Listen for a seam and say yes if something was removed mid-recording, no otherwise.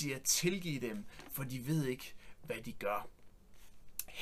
no